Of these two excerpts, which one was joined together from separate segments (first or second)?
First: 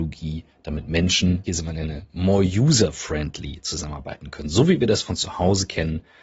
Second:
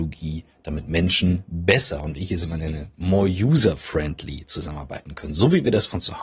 first